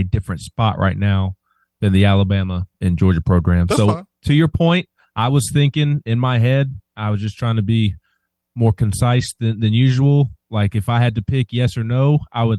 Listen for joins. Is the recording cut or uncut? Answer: uncut